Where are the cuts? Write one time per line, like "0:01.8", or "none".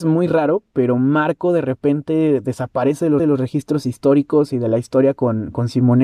0:03.2